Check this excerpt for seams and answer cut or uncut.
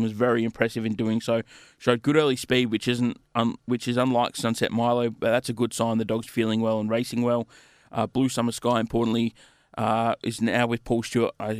uncut